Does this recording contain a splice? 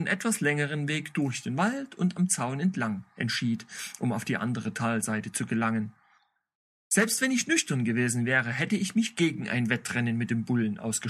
no; 0 cuts

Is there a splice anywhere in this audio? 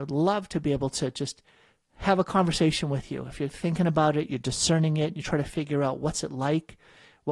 no; 0 cuts

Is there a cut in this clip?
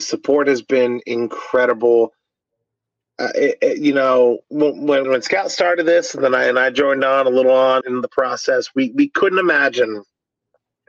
yes; 3 cuts; at 4.4 s, 5.0 s, 7.8 s

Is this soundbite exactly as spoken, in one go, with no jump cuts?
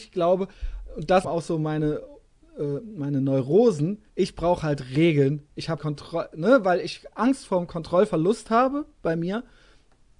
no; 3 cuts; at 1.2 s, 4.1 s, 5.8 s

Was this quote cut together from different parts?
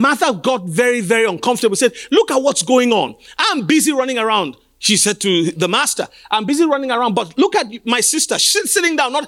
no; 0 cuts

